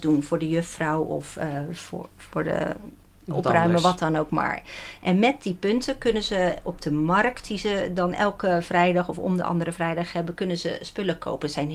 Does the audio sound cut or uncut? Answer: uncut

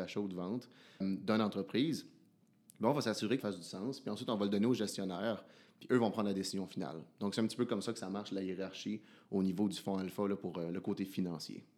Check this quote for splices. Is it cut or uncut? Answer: cut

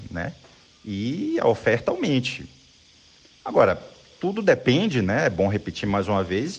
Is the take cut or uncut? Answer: uncut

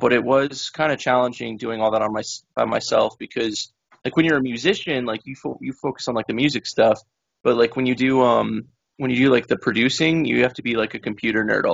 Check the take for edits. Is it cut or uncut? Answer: uncut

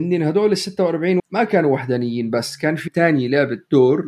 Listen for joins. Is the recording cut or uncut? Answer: cut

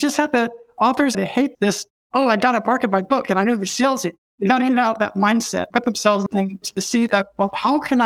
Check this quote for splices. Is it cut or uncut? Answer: cut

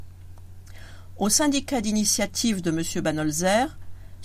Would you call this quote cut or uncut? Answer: uncut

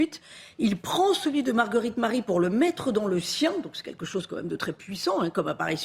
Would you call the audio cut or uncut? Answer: uncut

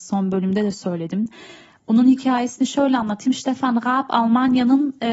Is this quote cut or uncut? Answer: uncut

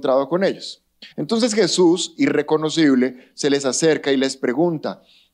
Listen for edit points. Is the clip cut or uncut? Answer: cut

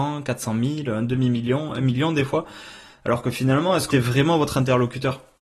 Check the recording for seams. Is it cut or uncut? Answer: cut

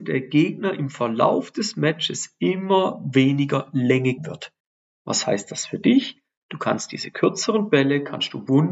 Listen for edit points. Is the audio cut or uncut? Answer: cut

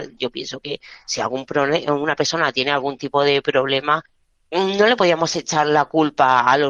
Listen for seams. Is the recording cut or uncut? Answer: uncut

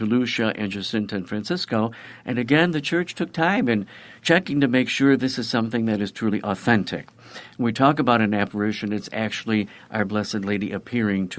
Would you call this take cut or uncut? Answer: cut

